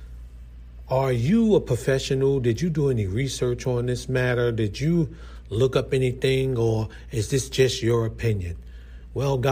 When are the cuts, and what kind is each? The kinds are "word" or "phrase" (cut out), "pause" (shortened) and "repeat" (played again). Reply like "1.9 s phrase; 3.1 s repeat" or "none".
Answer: none